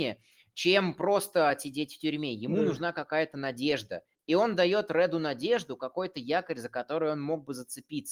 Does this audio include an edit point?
no; 0 cuts

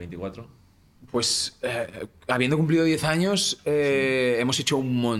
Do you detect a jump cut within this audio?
no; 0 cuts

